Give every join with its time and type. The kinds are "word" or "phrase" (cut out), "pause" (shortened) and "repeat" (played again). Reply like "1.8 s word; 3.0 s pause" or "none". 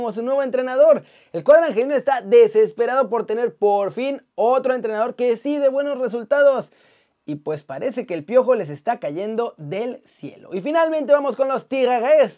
none